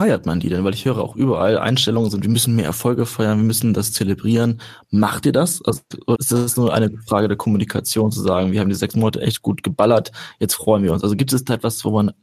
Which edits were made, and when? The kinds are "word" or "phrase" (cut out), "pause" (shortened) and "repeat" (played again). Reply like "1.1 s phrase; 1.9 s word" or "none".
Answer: 6.2 s word